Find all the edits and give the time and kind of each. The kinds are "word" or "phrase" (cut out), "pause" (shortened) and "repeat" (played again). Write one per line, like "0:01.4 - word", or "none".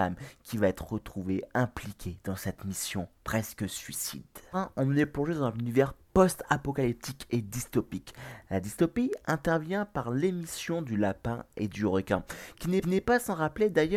0:04.5 - word
0:12.8 - repeat